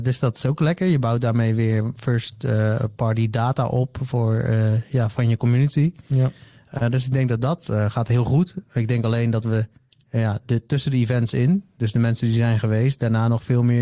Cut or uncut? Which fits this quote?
uncut